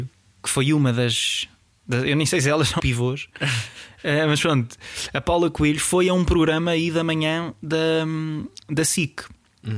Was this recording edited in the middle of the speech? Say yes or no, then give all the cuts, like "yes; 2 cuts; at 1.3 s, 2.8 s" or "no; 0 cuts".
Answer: yes; 1 cut; at 2.8 s